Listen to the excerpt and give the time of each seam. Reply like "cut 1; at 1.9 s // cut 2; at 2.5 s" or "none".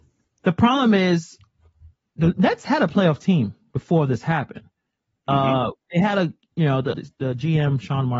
cut 1; at 6.9 s